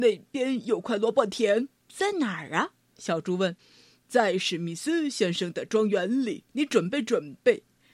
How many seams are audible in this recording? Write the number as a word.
three